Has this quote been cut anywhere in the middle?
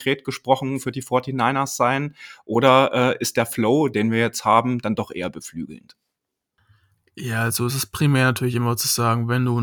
no; 0 cuts

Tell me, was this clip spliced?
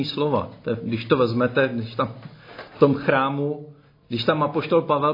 no; 0 cuts

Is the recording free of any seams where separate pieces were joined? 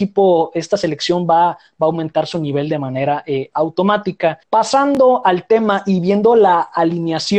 no; 1 cut; at 4.4 s

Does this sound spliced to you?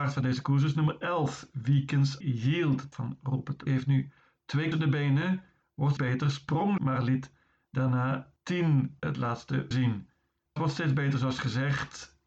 yes; 9 cuts; at 2.2 s, 2.9 s, 3.7 s, 4.7 s, 6.0 s, 6.8 s, 9.0 s, 9.7 s, 10.6 s

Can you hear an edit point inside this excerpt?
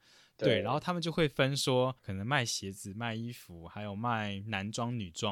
yes; 1 cut; at 2.0 s

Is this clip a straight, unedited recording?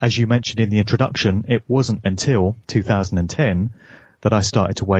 yes; 0 cuts

